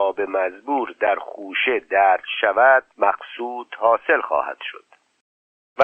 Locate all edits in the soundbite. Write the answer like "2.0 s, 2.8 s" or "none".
2.9 s